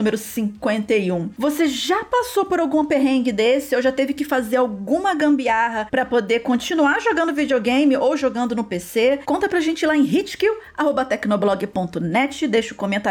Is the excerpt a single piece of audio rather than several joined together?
yes; 0 cuts

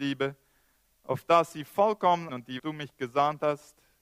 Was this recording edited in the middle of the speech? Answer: yes; 2 cuts; at 2.3 s, 2.6 s

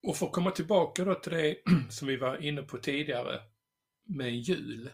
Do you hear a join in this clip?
no; 0 cuts

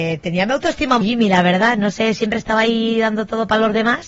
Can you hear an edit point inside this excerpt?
yes; 1 cut; at 1.0 s

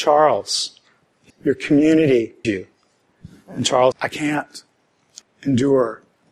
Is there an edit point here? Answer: yes; 4 cuts; at 1.3 s, 2.4 s, 3.9 s, 5.2 s

